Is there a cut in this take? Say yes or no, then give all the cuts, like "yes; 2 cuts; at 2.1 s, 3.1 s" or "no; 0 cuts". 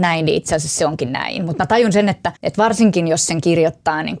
yes; 1 cut; at 2.4 s